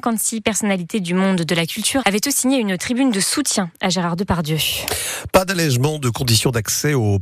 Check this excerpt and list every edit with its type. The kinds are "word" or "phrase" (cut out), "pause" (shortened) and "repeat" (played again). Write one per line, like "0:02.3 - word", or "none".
0:02.0 - word